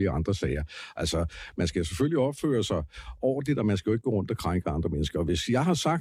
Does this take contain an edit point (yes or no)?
no